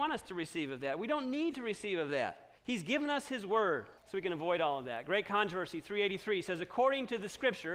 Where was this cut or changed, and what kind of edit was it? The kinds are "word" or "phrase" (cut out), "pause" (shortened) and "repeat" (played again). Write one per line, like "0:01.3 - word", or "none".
0:02.6 - pause
0:04.0 - pause